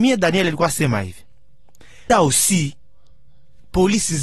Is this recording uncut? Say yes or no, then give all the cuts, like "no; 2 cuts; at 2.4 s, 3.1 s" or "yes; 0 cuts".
no; 1 cut; at 2.1 s